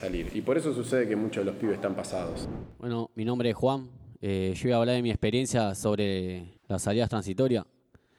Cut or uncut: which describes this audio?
cut